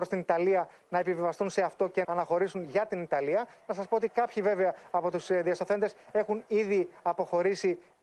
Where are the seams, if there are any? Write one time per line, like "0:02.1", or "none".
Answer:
0:02.0

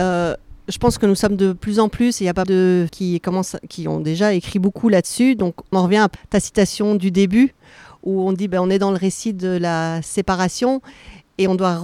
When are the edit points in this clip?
0:02.4
0:02.9
0:05.7
0:06.2

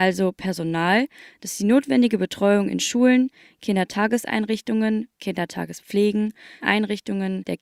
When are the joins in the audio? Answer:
0:06.6

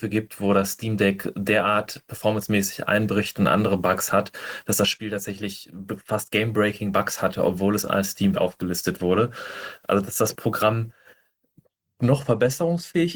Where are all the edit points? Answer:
0:08.3

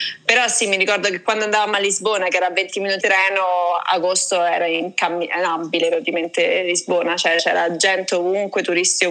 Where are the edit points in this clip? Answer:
0:03.0

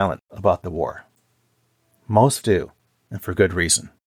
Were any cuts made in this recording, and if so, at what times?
0:02.4
0:02.8

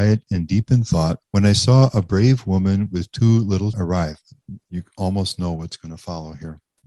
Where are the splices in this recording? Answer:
0:03.7

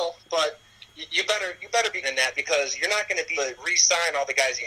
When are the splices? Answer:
0:02.0
0:03.3

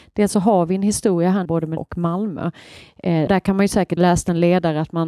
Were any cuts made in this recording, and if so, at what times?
0:01.4
0:01.8
0:03.3
0:04.0

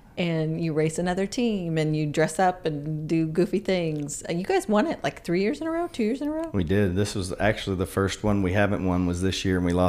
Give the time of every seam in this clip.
none

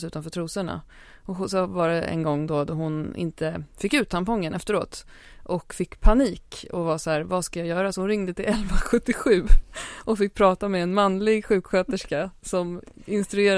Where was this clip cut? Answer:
none

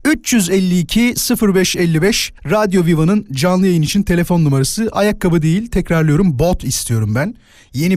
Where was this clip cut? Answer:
0:02.4

